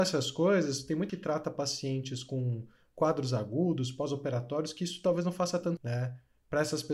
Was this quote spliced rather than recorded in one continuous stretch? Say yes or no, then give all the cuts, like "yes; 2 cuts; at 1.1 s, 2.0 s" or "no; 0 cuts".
yes; 2 cuts; at 1.1 s, 5.8 s